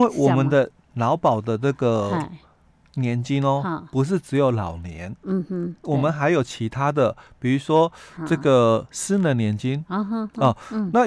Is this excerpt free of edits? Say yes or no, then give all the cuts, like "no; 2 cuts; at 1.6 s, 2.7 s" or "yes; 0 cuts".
yes; 0 cuts